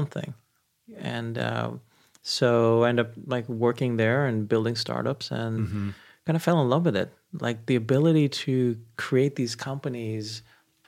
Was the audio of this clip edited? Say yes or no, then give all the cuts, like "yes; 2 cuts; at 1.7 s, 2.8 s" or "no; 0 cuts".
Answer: no; 0 cuts